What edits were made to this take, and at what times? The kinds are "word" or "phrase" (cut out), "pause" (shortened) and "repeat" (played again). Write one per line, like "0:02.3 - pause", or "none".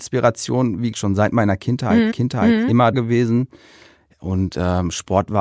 0:00.9 - word
0:02.1 - repeat
0:02.9 - word